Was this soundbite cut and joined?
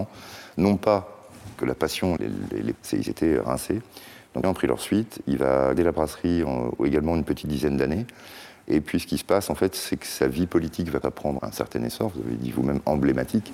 yes; 6 cuts; at 2.2 s, 2.7 s, 4.4 s, 5.8 s, 11.0 s, 11.4 s

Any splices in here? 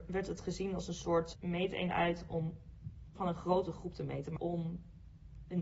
yes; 3 cuts; at 1.3 s, 3.1 s, 4.4 s

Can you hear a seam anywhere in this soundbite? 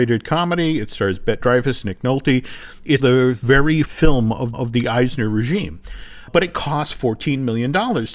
yes; 4 cuts; at 1.4 s, 3.0 s, 3.8 s, 4.5 s

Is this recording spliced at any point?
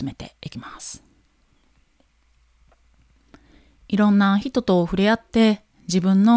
no; 0 cuts

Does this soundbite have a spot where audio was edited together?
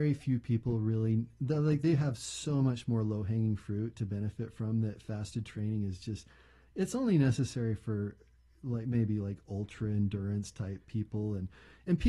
no; 0 cuts

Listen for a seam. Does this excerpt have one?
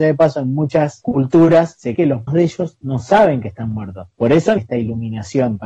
yes; 3 cuts; at 1.9 s, 2.3 s, 4.6 s

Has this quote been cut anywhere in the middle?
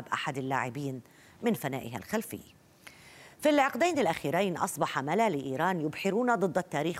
no; 0 cuts

